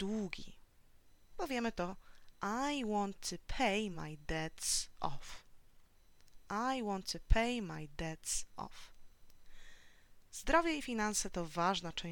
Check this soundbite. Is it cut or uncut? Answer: uncut